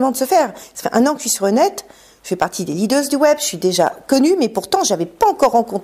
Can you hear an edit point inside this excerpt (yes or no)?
no